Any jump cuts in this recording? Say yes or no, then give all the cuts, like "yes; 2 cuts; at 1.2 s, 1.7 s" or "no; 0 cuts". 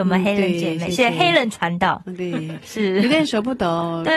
no; 0 cuts